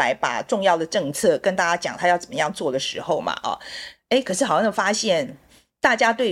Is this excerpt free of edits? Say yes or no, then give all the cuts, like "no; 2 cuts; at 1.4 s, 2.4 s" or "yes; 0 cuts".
yes; 0 cuts